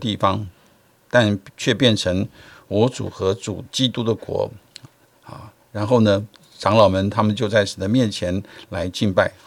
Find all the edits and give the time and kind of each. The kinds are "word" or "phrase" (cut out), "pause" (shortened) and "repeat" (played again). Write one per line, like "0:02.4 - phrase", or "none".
0:06.4 - word